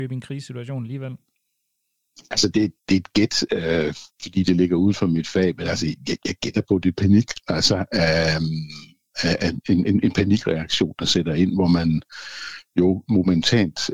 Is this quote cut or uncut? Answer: cut